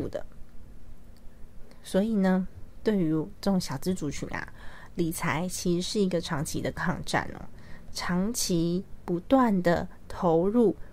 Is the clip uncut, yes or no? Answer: yes